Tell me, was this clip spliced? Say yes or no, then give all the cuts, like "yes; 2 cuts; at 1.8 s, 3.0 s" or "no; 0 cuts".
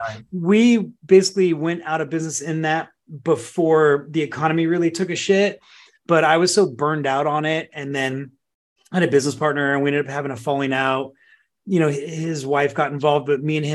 no; 0 cuts